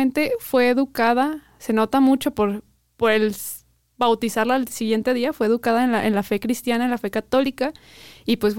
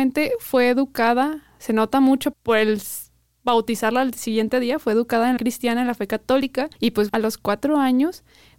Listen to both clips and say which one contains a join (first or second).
second